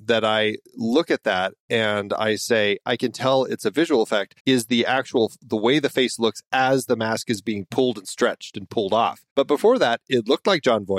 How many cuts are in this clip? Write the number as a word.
two